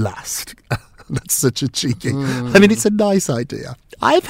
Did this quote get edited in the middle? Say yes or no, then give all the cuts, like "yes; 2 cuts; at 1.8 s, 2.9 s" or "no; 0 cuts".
no; 0 cuts